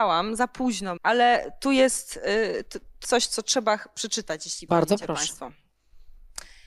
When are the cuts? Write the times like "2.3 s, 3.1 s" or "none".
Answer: 1.0 s, 3.0 s, 4.7 s